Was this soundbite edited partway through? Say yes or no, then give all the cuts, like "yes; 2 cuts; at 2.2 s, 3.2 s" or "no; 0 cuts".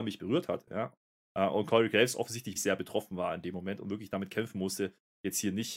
yes; 1 cut; at 2.6 s